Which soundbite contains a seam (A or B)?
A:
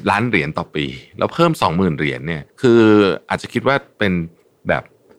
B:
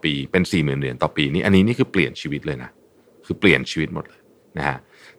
A